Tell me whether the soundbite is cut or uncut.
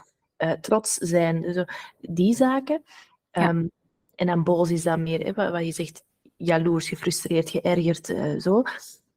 uncut